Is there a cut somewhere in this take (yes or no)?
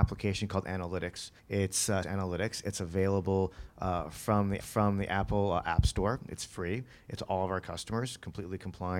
yes